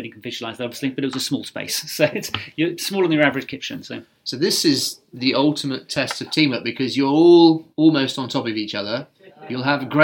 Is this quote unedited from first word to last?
no; 1 cut; at 7.7 s

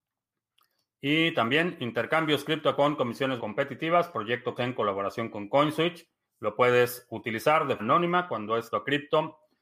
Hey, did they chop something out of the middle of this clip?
yes; 6 cuts; at 2.8 s, 3.4 s, 4.6 s, 6.2 s, 7.8 s, 8.7 s

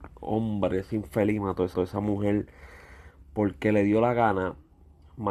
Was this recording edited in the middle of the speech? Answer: yes; 1 cut; at 1.7 s

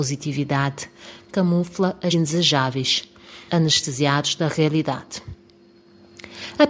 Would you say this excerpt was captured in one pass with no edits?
no; 3 cuts; at 1.3 s, 2.1 s, 3.5 s

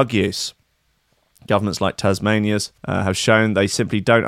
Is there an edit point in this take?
yes; 1 cut; at 2.8 s

